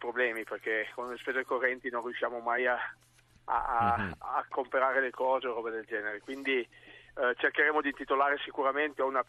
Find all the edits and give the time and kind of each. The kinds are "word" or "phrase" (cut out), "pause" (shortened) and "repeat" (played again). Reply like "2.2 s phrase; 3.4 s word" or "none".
none